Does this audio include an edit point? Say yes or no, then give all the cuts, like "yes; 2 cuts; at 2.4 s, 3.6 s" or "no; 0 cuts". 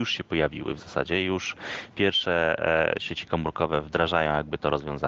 no; 0 cuts